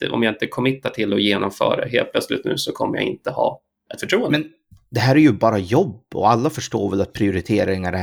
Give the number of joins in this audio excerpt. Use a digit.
0